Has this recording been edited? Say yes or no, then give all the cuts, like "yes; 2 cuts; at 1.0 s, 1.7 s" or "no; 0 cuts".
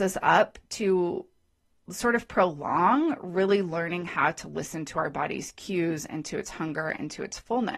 no; 0 cuts